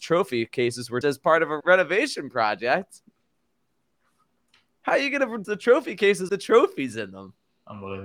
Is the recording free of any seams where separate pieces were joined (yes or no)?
no